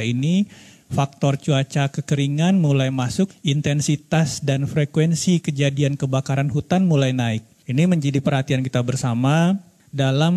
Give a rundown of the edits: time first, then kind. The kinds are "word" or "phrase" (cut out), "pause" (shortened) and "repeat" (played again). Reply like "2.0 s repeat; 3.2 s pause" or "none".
3.3 s word

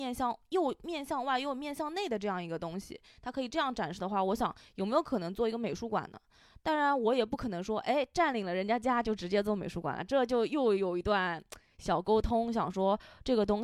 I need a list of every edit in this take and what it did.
none

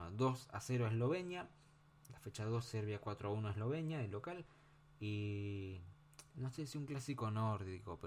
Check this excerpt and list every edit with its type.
none

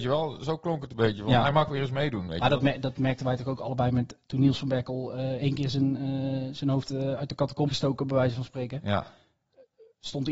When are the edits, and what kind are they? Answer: 6.9 s word; 7.7 s word

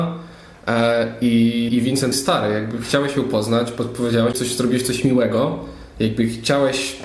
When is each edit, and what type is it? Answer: 1.7 s word; 2.1 s phrase; 4.3 s word

